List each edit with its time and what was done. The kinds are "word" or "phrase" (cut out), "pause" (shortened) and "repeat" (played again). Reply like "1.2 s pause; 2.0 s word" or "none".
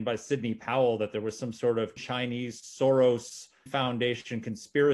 2.0 s word; 3.7 s word